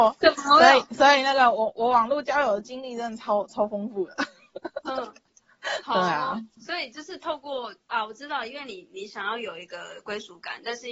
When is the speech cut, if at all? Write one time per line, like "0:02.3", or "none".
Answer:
0:06.5